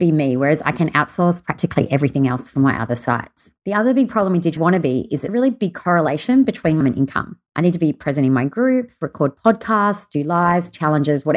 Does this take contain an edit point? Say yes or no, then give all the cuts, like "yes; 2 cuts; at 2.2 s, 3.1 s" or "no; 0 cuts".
yes; 5 cuts; at 3.6 s, 4.6 s, 5.3 s, 6.8 s, 7.5 s